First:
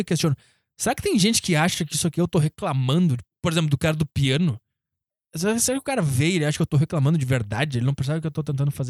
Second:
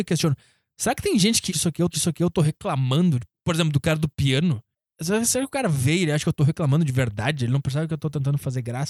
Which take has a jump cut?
second; 3 cuts; at 1.5 s, 1.9 s, 4.7 s

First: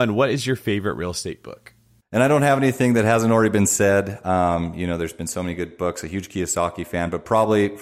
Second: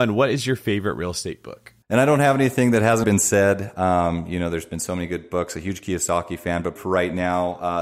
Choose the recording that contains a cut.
second; 3 cuts; at 1.8 s, 3.0 s, 6.8 s

